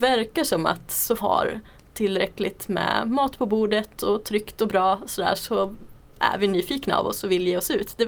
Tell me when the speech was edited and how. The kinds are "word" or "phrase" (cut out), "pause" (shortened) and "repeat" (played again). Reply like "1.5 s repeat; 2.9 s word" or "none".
1.2 s phrase